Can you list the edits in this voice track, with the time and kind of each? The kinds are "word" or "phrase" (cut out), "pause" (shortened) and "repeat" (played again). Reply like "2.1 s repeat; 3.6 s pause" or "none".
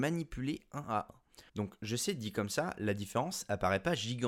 1.5 s pause